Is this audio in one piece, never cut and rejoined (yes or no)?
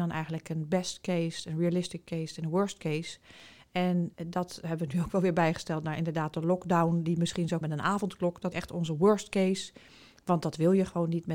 no